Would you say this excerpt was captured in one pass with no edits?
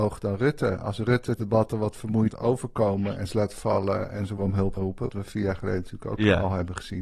no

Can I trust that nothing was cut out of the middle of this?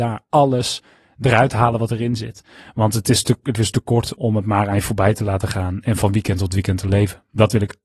no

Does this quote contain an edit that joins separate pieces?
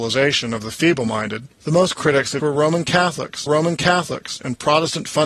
yes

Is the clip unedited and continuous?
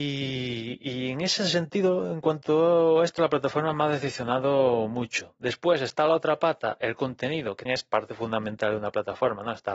no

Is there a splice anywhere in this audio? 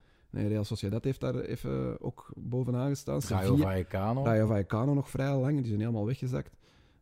no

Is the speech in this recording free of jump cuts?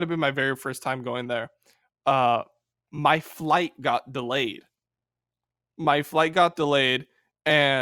yes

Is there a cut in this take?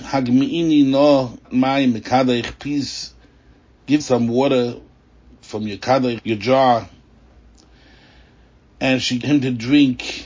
yes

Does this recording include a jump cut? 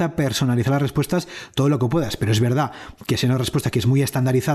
no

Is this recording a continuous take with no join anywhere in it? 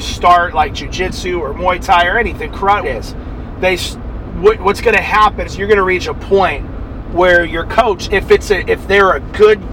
no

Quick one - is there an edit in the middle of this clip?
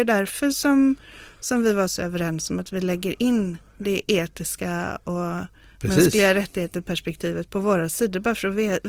no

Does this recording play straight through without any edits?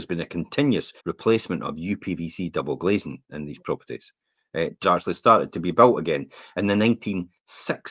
no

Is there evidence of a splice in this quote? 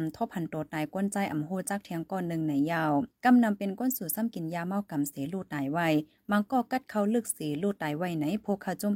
yes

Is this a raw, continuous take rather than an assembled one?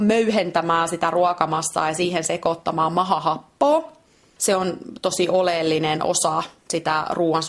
yes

